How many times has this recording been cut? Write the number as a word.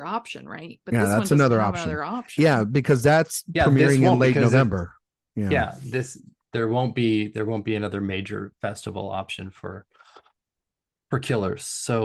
zero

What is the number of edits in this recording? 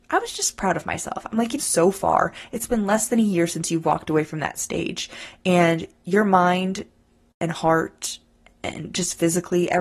one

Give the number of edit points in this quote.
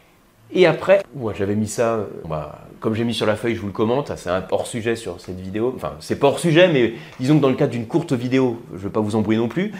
three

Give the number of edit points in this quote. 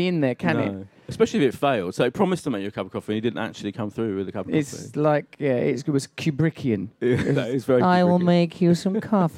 zero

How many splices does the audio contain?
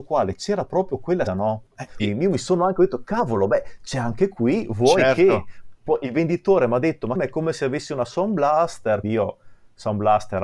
four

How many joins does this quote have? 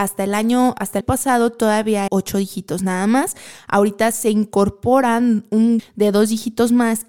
three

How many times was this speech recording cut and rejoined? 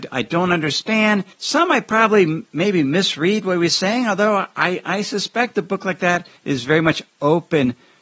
two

